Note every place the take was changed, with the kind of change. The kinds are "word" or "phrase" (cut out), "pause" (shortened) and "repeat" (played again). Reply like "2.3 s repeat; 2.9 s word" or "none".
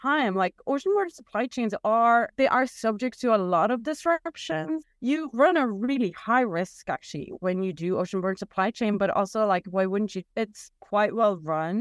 2.3 s pause